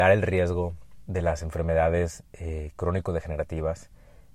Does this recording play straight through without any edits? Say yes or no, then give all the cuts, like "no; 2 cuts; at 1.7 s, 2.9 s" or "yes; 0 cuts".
yes; 0 cuts